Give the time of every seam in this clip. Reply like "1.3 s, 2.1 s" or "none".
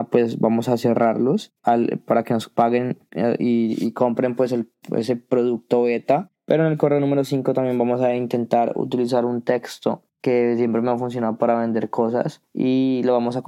none